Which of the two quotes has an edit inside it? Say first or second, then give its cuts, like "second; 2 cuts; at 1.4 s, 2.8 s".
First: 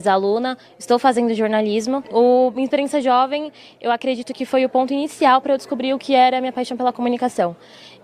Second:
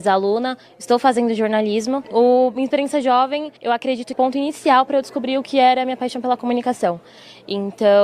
second; 2 cuts; at 3.6 s, 4.1 s